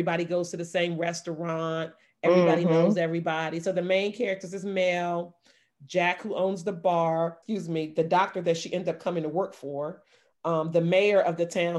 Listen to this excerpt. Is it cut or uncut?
uncut